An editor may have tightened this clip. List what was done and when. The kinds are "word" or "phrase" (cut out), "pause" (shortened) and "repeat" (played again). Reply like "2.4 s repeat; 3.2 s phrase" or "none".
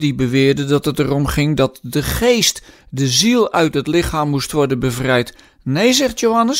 none